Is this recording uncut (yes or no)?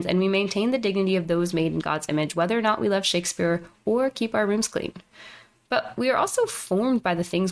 yes